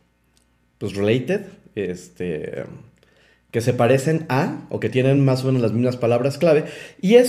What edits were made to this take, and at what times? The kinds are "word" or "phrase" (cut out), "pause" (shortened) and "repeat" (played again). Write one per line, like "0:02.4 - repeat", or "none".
none